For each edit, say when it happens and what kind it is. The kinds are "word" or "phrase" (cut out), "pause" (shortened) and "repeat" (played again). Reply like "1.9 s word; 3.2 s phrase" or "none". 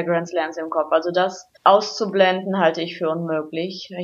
1.6 s pause